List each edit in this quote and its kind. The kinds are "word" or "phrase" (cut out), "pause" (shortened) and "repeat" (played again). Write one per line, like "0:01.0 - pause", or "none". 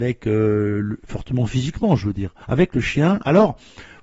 0:02.4 - pause